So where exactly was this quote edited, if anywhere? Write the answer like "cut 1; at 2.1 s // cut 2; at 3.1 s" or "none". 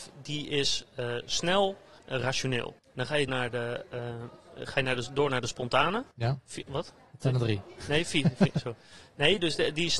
cut 1; at 2.0 s // cut 2; at 2.8 s // cut 3; at 3.3 s // cut 4; at 6.1 s